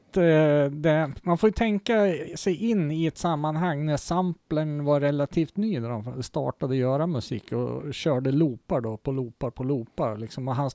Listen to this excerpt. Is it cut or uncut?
uncut